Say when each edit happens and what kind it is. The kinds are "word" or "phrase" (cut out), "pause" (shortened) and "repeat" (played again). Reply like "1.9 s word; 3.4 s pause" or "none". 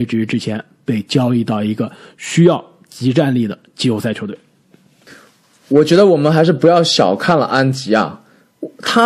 none